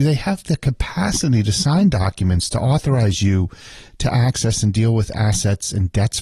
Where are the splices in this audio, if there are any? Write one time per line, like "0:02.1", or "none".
none